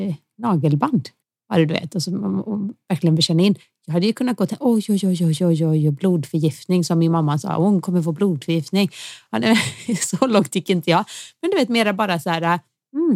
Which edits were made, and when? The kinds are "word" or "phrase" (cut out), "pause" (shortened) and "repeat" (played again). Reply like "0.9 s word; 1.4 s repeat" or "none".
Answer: 5.4 s word